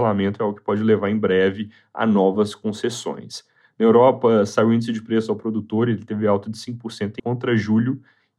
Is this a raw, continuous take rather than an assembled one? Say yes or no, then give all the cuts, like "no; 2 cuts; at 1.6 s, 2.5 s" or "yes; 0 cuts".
no; 1 cut; at 7.2 s